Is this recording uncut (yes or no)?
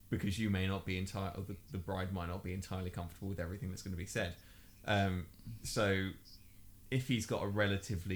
yes